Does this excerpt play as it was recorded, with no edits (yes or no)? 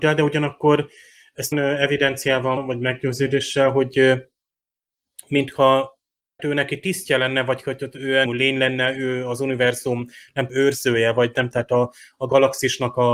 no